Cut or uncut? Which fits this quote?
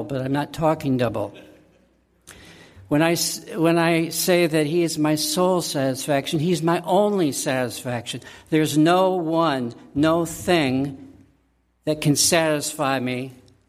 uncut